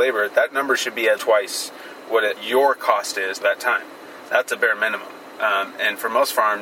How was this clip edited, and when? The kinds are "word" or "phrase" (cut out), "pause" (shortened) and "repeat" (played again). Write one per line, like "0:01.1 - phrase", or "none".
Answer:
0:01.2 - word
0:02.4 - word
0:03.4 - phrase